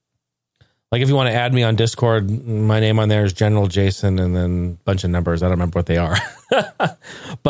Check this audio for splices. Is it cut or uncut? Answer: uncut